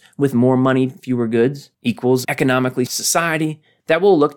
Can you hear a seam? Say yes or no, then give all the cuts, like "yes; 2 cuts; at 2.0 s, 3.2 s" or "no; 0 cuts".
yes; 3 cuts; at 1.0 s, 2.2 s, 2.9 s